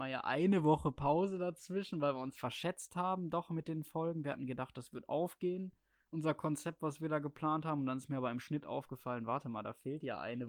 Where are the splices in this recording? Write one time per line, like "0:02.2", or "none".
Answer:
none